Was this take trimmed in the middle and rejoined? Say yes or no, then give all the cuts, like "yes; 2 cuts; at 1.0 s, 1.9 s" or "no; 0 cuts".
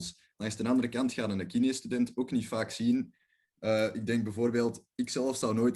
no; 0 cuts